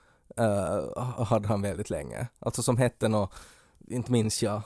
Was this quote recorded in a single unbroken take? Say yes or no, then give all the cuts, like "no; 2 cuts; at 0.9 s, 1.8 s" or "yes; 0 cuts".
yes; 0 cuts